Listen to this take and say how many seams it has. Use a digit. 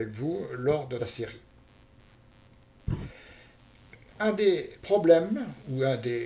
2